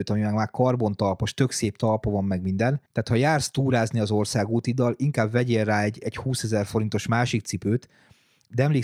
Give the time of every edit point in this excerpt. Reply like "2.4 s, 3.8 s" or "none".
2.9 s